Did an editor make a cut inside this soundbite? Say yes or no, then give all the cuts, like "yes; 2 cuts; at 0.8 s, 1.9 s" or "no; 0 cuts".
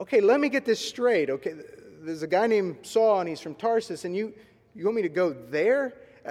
no; 0 cuts